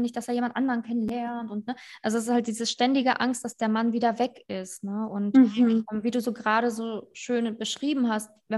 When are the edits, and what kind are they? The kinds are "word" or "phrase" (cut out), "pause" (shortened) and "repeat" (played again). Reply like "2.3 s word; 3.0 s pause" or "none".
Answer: none